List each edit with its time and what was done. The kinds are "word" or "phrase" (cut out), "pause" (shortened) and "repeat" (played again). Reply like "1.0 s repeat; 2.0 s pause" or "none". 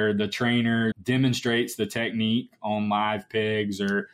0.9 s word